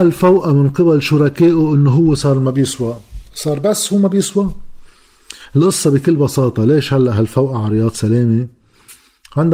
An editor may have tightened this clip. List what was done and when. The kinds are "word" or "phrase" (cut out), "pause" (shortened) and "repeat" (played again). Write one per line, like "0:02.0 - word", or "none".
none